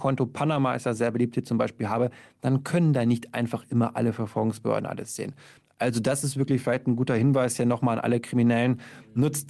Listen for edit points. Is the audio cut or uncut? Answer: uncut